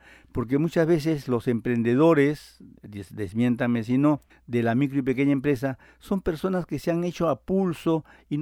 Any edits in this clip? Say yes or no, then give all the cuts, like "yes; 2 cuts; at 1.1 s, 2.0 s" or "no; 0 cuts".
yes; 1 cut; at 4.3 s